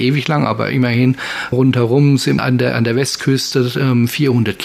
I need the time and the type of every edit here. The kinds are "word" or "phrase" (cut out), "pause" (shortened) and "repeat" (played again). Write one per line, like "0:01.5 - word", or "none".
0:01.5 - word
0:02.4 - phrase